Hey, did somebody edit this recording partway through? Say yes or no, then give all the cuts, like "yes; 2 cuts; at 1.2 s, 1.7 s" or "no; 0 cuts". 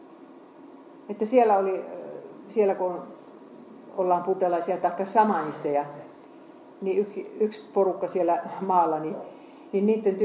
no; 0 cuts